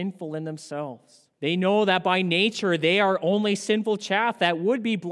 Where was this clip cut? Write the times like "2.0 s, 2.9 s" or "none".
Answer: 1.3 s